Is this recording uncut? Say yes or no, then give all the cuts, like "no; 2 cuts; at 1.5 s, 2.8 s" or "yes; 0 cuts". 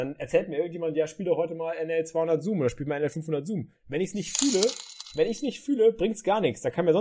yes; 0 cuts